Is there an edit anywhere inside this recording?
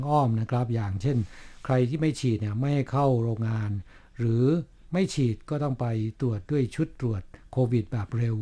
no; 0 cuts

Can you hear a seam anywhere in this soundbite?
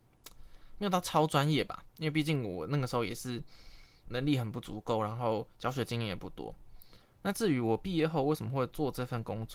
yes; 1 cut; at 4.0 s

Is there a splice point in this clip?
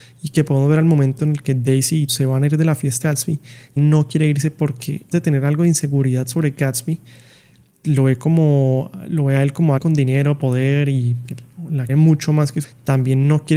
yes; 9 cuts; at 2.1 s, 3.0 s, 3.8 s, 5.1 s, 7.8 s, 9.8 s, 11.2 s, 11.9 s, 12.6 s

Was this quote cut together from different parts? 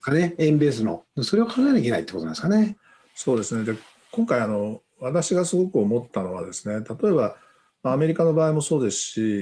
no; 0 cuts

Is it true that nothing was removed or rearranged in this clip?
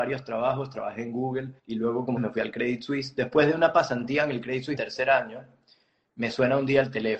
no; 3 cuts; at 1.6 s, 2.2 s, 4.8 s

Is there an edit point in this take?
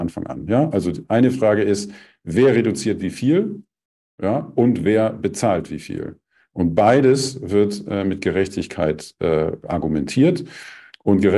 no; 0 cuts

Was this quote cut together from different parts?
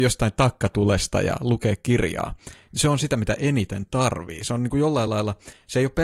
no; 0 cuts

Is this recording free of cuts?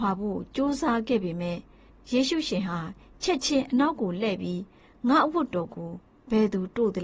yes; 0 cuts

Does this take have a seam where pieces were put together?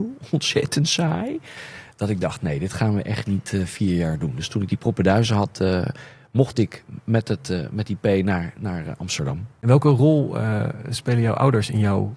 no; 0 cuts

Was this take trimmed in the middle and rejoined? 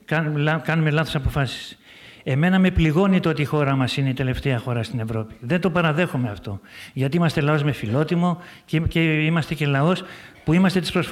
no; 0 cuts

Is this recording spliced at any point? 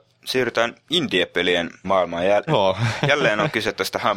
yes; 2 cuts; at 1.8 s, 2.5 s

